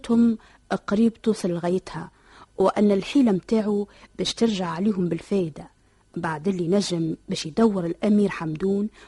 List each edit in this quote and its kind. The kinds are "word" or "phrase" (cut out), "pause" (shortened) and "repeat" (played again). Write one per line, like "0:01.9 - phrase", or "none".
none